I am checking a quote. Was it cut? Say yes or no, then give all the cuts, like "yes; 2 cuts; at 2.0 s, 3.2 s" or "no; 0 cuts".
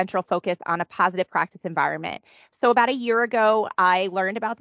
no; 0 cuts